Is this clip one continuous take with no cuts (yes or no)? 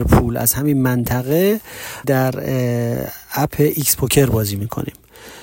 no